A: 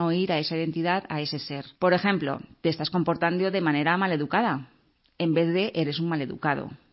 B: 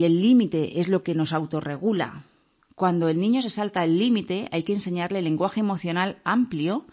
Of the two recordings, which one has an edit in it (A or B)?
A